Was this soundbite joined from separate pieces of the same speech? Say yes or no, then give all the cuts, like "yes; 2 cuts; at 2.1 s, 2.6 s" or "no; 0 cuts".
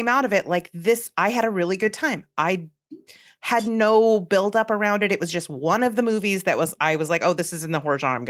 no; 0 cuts